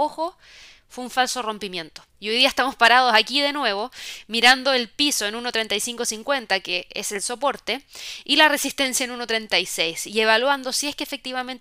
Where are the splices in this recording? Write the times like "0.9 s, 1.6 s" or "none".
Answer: 2.1 s